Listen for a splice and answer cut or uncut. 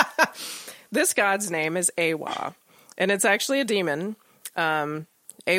uncut